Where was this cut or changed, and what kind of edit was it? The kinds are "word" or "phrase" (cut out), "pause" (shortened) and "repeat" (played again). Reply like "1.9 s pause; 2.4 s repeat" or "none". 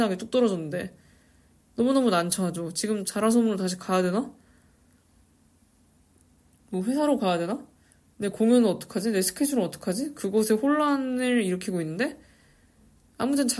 none